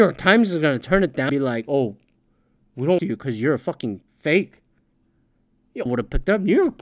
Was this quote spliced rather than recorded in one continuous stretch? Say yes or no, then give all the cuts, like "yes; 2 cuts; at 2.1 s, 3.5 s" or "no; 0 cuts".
yes; 4 cuts; at 1.3 s, 3.0 s, 4.1 s, 5.9 s